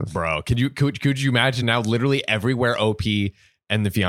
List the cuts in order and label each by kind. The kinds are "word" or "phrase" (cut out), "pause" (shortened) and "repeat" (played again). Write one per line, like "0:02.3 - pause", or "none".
none